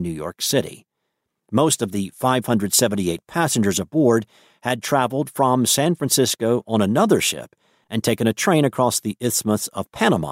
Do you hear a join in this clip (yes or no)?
no